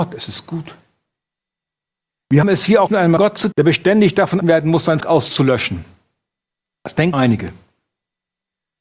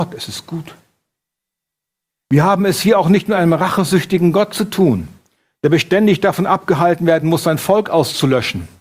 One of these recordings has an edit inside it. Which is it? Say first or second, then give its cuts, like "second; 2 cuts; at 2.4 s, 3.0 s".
first; 7 cuts; at 2.4 s, 2.9 s, 3.2 s, 3.5 s, 4.4 s, 5.0 s, 7.1 s